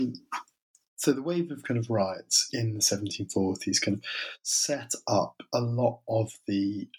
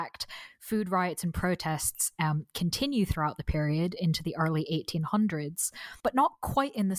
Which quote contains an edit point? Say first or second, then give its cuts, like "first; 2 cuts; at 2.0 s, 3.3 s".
second; 1 cut; at 6.0 s